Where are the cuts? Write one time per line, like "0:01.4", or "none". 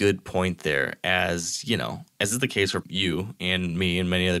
0:02.8